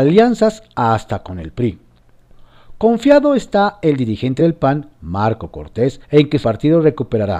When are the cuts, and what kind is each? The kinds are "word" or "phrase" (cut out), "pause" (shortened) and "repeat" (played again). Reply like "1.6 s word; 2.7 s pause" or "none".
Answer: 4.4 s word; 6.0 s pause; 6.4 s word

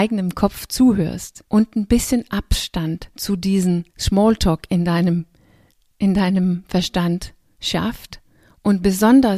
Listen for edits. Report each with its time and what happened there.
1.5 s pause; 3.1 s pause; 3.9 s pause

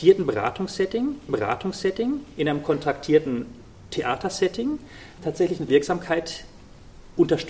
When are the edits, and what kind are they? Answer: 1.3 s repeat; 5.2 s word; 5.7 s word

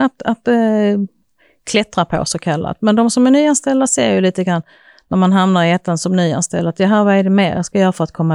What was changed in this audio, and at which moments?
none

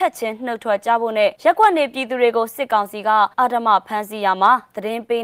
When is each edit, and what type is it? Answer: 1.3 s pause; 3.3 s pause

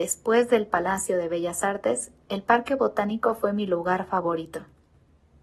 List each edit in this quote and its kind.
none

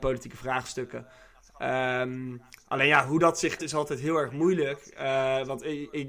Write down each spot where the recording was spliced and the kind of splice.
3.6 s word

